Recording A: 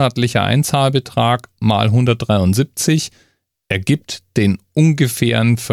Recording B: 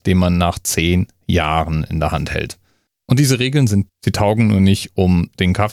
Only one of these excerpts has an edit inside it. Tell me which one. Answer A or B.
B